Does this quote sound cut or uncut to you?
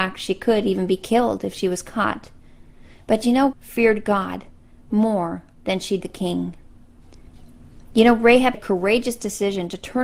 cut